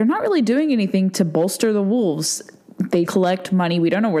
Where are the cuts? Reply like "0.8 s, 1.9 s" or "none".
3.0 s